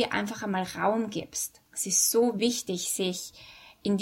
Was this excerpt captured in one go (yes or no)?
no